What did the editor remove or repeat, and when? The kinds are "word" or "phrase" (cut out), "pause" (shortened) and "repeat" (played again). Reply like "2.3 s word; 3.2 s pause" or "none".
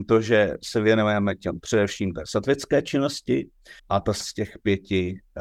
1.6 s word; 3.8 s pause; 4.2 s word